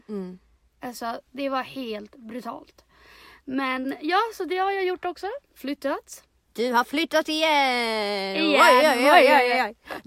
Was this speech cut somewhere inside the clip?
no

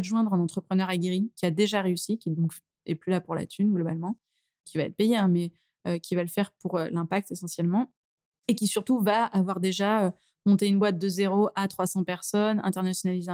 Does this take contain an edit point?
no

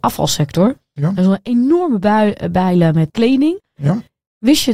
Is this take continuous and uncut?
no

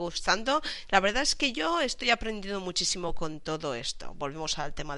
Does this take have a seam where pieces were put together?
no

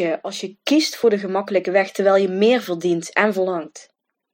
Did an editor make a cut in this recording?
no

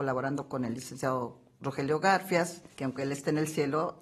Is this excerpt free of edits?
no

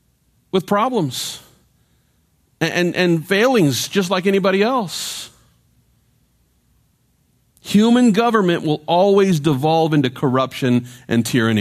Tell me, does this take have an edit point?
no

